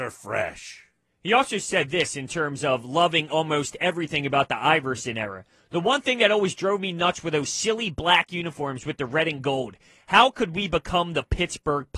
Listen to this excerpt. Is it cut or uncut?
uncut